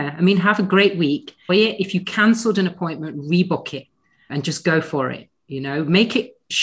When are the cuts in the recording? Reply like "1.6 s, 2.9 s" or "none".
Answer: 1.5 s, 4.3 s